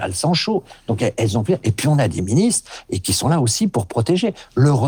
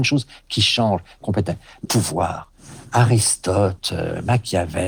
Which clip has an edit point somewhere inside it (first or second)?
second